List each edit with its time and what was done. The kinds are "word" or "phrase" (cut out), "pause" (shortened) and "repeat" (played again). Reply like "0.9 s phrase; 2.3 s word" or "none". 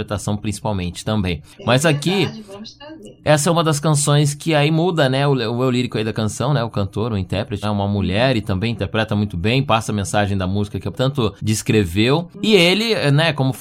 7.6 s phrase; 10.9 s word; 11.4 s pause